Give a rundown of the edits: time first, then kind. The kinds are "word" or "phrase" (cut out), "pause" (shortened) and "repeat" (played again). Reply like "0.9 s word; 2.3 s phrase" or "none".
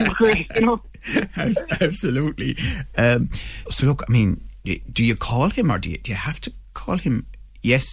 3.7 s word